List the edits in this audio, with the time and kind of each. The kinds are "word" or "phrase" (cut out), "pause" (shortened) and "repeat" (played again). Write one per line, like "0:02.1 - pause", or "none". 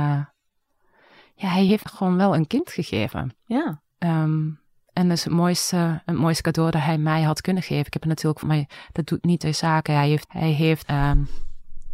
0:01.8 - word
0:03.9 - pause
0:08.4 - word
0:10.2 - word
0:10.8 - word